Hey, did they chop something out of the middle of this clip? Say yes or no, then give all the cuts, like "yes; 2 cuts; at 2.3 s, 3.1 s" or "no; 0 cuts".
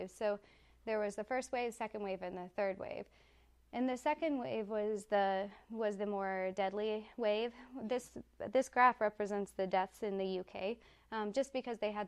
no; 0 cuts